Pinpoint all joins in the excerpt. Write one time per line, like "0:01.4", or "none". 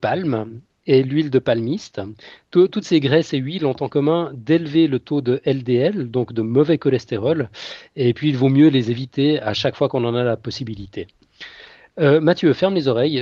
none